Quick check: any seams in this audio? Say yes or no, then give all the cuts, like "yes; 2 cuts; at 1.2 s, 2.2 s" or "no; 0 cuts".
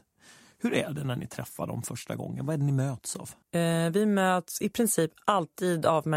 yes; 1 cut; at 3.4 s